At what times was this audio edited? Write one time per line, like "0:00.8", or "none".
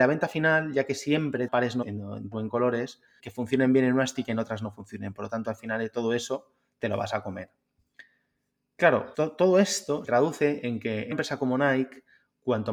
0:01.5
0:01.8
0:02.3
0:03.2
0:04.2
0:09.1
0:10.0
0:11.1